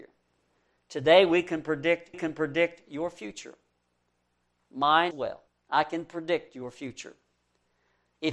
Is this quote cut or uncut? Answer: cut